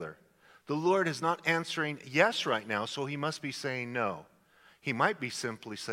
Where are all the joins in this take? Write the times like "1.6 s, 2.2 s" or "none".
none